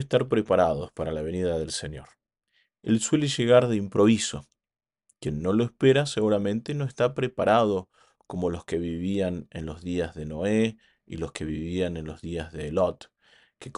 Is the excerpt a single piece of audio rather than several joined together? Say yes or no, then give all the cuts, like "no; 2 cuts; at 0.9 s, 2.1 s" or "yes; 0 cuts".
yes; 0 cuts